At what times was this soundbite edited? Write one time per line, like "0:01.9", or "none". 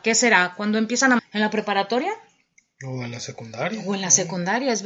0:01.2